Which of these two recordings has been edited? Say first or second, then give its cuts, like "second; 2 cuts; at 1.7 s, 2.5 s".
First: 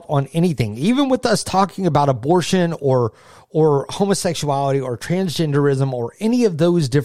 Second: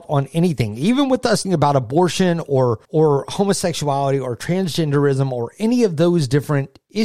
second; 2 cuts; at 1.4 s, 2.8 s